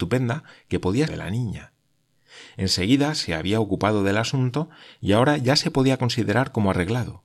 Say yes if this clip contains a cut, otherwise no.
yes